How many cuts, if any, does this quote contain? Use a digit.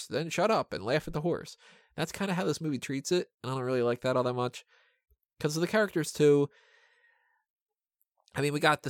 0